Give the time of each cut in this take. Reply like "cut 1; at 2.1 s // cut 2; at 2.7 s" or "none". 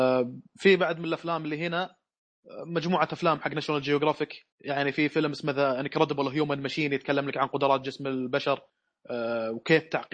cut 1; at 4.5 s